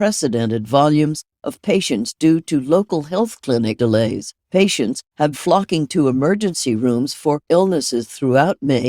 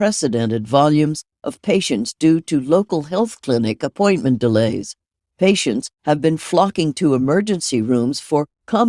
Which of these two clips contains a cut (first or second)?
first